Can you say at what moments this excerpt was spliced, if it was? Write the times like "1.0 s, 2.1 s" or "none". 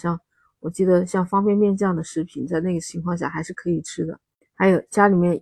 4.4 s